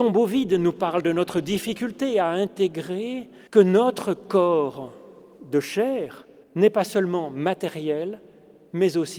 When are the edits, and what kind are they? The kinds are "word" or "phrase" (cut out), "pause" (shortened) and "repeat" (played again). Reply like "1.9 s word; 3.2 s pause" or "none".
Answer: 3.5 s pause; 6.4 s pause